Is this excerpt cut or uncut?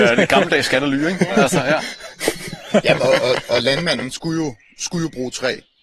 uncut